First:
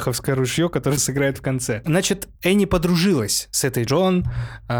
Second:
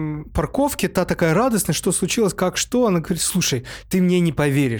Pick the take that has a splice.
first; 3 cuts; at 1.0 s, 2.4 s, 3.9 s

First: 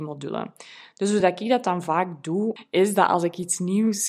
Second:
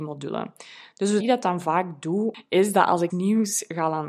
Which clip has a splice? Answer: second; 2 cuts; at 1.2 s, 3.1 s

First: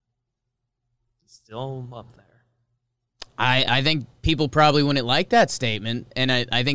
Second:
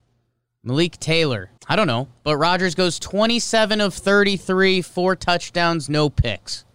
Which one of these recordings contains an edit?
second; 1 cut; at 1.6 s

